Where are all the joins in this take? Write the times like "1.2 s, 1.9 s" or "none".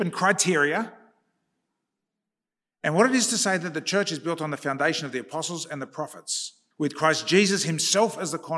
6.7 s